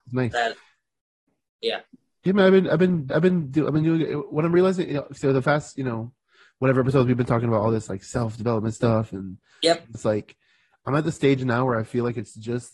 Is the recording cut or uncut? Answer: cut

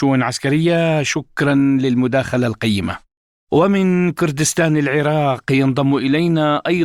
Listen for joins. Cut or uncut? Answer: uncut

